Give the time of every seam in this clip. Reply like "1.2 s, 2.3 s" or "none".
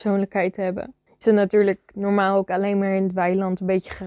1.2 s, 2.5 s